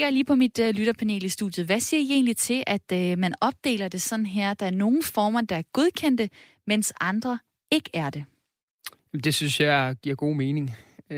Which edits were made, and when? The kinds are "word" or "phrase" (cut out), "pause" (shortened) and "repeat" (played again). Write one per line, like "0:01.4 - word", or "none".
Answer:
none